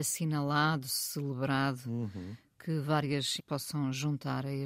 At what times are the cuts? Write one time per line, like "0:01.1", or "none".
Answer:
0:03.4